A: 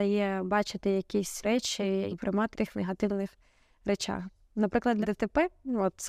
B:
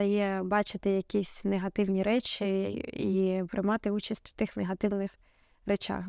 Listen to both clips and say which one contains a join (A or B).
A